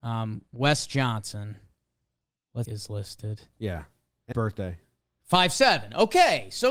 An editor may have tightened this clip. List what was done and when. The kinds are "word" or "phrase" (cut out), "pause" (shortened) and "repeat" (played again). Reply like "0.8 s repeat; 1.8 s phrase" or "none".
2.6 s phrase; 4.3 s word